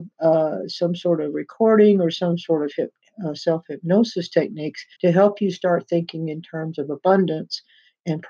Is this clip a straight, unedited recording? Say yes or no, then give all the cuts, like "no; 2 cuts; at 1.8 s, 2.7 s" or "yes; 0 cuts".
no; 1 cut; at 4.9 s